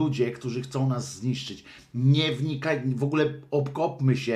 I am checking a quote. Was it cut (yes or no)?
no